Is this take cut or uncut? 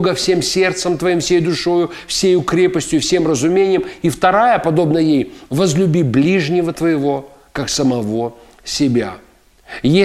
uncut